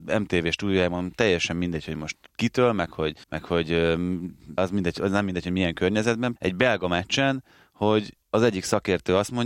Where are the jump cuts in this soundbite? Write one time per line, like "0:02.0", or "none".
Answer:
0:02.3
0:03.2
0:04.6
0:06.4
0:08.2